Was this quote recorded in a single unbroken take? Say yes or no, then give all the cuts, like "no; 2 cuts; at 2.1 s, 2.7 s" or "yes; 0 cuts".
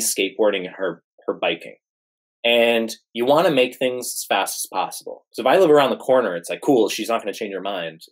yes; 0 cuts